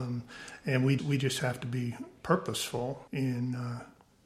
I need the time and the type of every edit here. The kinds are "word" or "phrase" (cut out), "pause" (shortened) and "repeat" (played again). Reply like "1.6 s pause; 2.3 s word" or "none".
1.0 s word; 3.1 s pause